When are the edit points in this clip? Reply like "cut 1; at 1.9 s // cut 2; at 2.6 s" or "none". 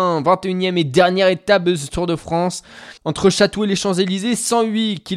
cut 1; at 3.0 s

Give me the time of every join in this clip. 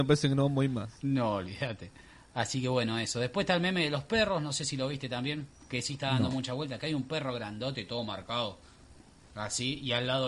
none

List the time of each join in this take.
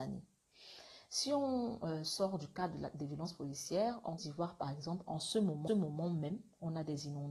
cut 1; at 4.2 s // cut 2; at 5.7 s

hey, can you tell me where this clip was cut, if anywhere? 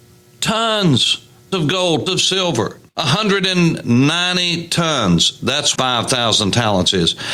cut 1; at 1.5 s // cut 2; at 2.1 s // cut 3; at 2.9 s // cut 4; at 5.8 s

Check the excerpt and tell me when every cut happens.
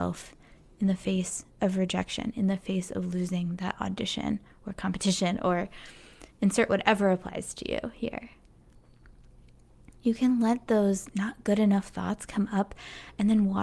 cut 1; at 1.5 s

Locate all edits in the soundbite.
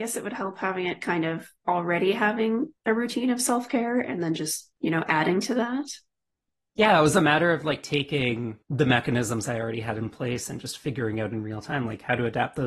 cut 1; at 1.6 s // cut 2; at 2.8 s // cut 3; at 4.8 s // cut 4; at 8.6 s

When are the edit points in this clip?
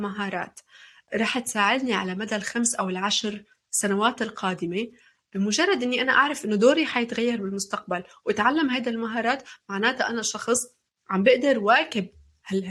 none

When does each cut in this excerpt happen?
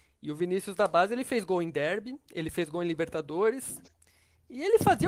none

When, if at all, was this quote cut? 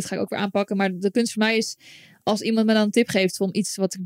none

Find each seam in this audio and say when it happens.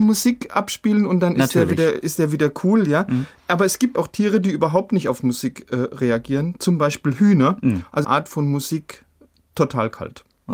cut 1; at 3.9 s // cut 2; at 8.0 s

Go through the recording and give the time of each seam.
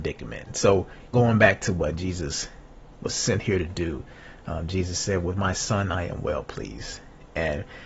cut 1; at 1.1 s

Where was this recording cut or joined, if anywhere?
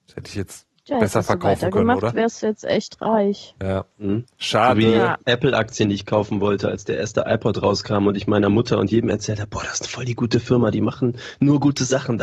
cut 1; at 5.2 s

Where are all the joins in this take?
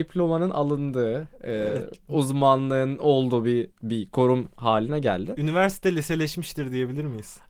none

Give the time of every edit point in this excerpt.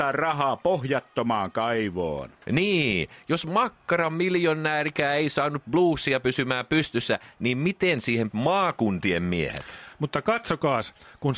cut 1; at 8.3 s

